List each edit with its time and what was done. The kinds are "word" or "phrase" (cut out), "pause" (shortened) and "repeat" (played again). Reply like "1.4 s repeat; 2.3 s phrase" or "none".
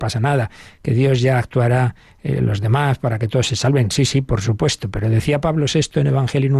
none